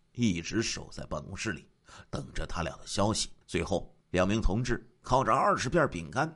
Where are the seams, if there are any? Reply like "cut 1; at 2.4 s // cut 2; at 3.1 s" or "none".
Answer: cut 1; at 3.4 s // cut 2; at 4.0 s